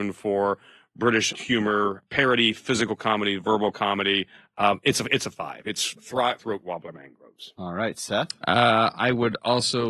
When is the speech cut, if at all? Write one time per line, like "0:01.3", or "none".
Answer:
0:01.3
0:06.4